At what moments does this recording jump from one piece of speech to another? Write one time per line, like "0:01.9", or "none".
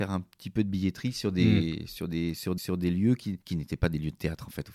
0:02.6
0:03.4